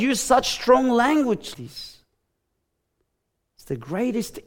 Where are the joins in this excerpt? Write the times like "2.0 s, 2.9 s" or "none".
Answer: 1.5 s